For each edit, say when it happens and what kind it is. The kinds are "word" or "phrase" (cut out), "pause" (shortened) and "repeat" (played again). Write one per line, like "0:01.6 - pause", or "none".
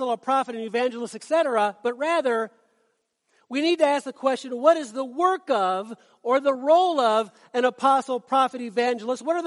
none